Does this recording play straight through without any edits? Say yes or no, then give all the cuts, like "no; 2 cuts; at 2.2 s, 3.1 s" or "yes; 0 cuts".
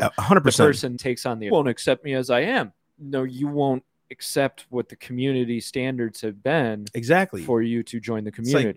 no; 3 cuts; at 1.0 s, 1.5 s, 2.8 s